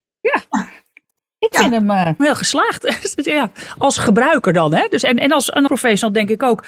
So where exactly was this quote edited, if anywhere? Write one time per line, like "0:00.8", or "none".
0:02.2
0:05.7